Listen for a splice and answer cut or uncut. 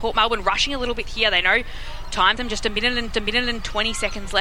cut